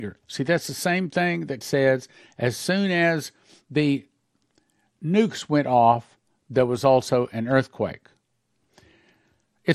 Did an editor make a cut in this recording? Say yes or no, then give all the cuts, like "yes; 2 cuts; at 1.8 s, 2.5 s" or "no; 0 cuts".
yes; 1 cut; at 1.6 s